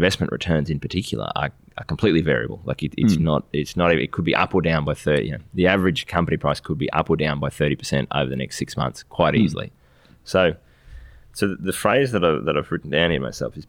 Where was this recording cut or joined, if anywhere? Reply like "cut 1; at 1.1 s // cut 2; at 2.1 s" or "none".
none